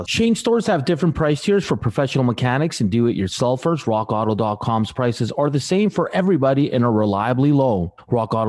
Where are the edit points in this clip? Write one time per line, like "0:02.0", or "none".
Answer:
none